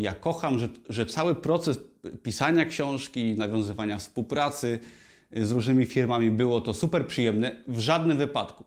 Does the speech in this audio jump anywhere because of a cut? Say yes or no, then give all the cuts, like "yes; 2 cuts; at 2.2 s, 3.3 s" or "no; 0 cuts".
no; 0 cuts